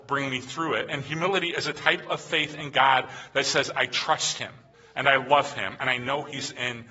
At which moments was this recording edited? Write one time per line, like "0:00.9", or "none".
0:04.7